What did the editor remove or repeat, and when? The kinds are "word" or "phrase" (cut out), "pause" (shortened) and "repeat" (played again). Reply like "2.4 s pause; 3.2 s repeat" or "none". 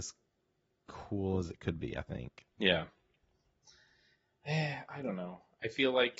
2.5 s pause